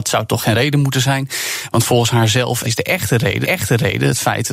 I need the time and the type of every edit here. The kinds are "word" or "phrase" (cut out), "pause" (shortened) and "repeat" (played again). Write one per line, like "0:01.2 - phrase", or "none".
0:02.6 - phrase
0:03.4 - repeat

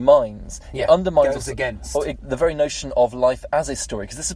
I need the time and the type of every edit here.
0:02.1 - phrase

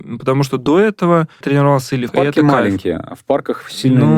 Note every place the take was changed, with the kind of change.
0:01.4 - word
0:02.1 - phrase

